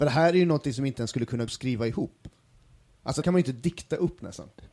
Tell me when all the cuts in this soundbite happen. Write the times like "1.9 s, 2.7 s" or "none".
1.5 s, 3.2 s